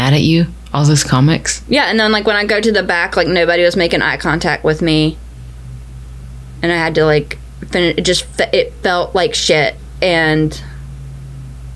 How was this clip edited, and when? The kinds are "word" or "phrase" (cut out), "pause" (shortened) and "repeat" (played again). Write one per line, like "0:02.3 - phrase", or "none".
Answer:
none